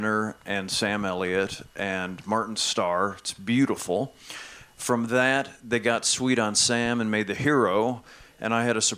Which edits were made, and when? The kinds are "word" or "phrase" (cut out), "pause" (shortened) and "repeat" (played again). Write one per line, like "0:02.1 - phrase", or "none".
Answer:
none